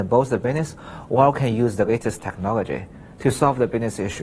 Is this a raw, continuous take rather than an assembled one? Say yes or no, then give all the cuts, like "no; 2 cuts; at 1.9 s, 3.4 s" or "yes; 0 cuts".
yes; 0 cuts